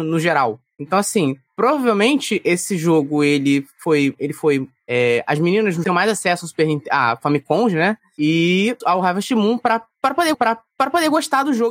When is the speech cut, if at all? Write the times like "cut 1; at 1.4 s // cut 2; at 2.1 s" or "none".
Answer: cut 1; at 5.8 s // cut 2; at 8.8 s // cut 3; at 10.3 s